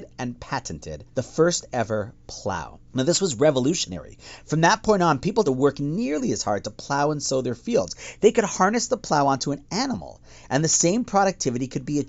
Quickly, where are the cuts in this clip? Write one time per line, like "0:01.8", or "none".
0:01.1
0:02.9
0:05.5